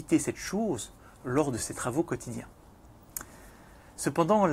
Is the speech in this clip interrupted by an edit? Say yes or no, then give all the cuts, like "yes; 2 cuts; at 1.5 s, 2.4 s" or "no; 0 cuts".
no; 0 cuts